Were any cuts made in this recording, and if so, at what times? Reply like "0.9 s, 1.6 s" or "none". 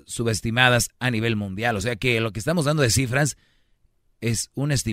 none